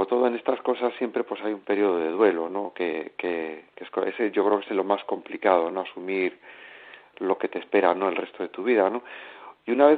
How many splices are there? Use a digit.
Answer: 0